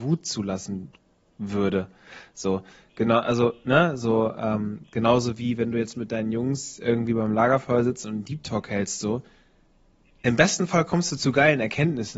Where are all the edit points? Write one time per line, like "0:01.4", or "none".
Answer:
none